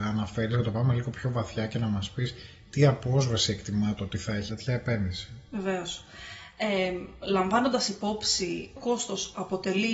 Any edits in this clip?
yes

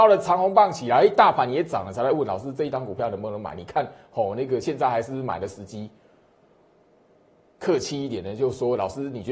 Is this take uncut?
yes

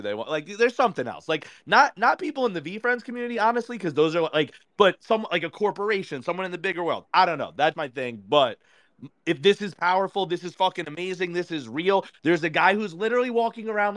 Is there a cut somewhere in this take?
yes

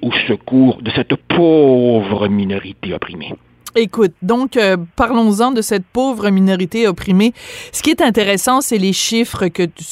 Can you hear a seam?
yes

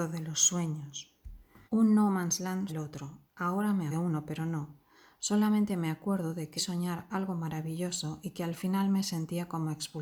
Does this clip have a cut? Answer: yes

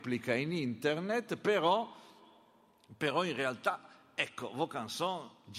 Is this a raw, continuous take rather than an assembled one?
yes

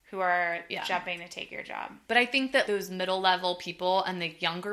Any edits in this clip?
yes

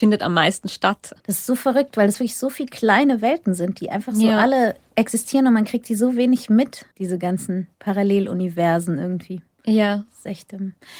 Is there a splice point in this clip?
yes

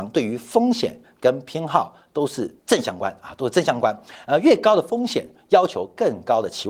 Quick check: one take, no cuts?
no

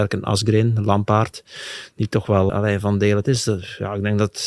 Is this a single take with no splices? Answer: no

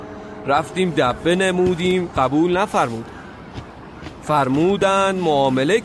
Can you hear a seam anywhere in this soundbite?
no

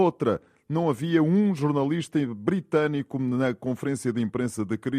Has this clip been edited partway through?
no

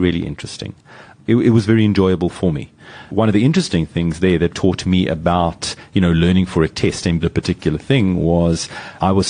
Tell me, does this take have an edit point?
yes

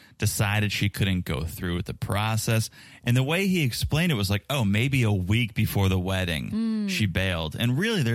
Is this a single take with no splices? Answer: yes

